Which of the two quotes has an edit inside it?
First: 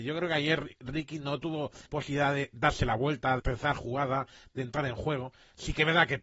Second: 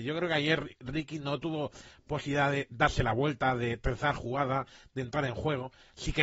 first; 2 cuts; at 1.8 s, 3.4 s

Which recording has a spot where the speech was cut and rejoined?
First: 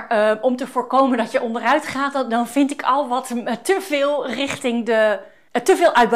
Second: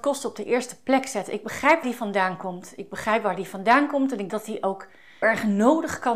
second; 3 cuts; at 1.8 s, 4.3 s, 5.2 s

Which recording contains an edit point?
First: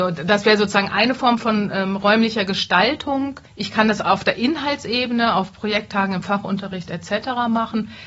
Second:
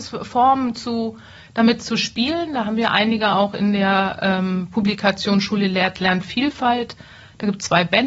first; 1 cut; at 3.5 s

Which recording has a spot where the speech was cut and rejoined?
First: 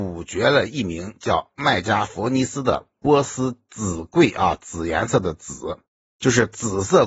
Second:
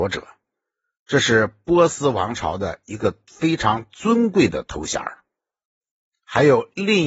first; 1 cut; at 5.9 s

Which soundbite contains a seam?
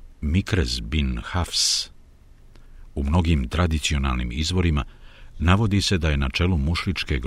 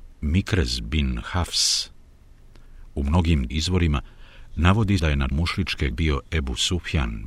second; 4 cuts; at 3.5 s, 5.0 s, 5.3 s, 5.9 s

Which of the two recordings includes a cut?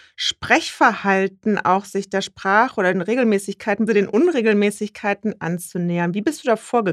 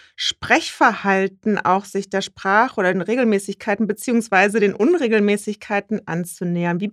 first; 1 cut; at 3.9 s

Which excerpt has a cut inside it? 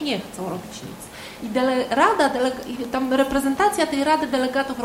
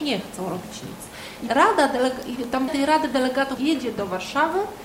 second; 3 cuts; at 1.5 s, 2.7 s, 3.6 s

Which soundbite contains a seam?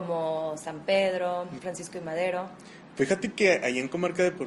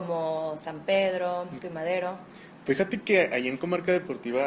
second; 1 cut; at 1.6 s

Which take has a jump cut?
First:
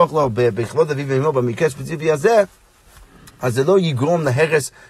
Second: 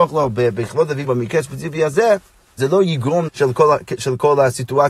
second; 3 cuts; at 1.0 s, 2.6 s, 3.3 s

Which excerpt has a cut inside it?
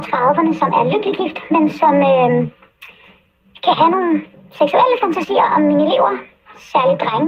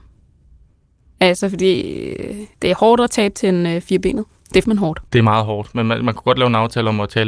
second; 4 cuts; at 2.5 s, 4.3 s, 4.6 s, 5.1 s

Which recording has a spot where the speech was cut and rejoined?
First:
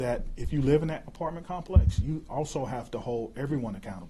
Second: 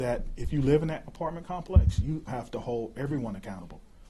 second; 1 cut; at 2.3 s

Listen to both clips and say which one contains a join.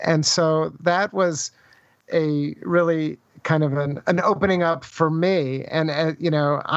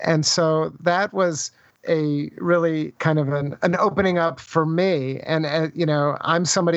second; 2 cuts; at 1.7 s, 3.0 s

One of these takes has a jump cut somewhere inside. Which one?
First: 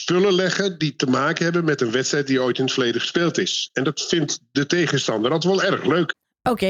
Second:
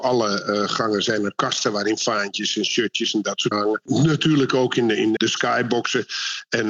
second; 2 cuts; at 3.5 s, 5.2 s

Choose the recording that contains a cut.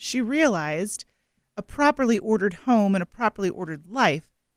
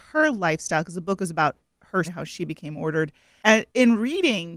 second; 1 cut; at 2.0 s

